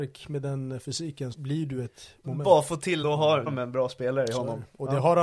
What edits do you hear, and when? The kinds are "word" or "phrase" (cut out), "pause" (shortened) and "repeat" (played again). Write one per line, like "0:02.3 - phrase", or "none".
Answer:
0:01.3 - word
0:02.2 - word
0:03.0 - word
0:03.5 - phrase